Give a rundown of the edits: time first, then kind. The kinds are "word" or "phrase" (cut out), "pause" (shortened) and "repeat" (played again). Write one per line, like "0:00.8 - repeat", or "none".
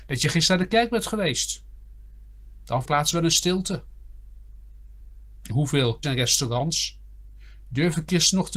0:02.9 - phrase
0:05.5 - word
0:06.0 - word